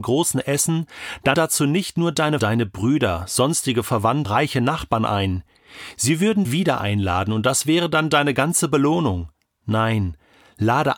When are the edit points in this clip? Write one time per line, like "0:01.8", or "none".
0:01.3
0:02.4
0:04.2
0:06.4